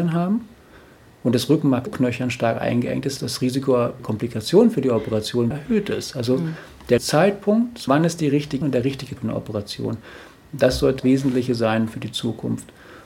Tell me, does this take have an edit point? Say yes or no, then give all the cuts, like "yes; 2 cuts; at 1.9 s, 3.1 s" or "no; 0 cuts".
yes; 9 cuts; at 1.9 s, 3.2 s, 4.0 s, 5.5 s, 7.0 s, 7.9 s, 8.6 s, 9.2 s, 11.0 s